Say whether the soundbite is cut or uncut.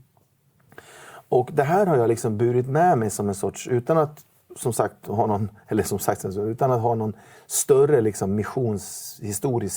uncut